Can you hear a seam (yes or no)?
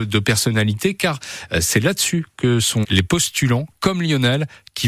yes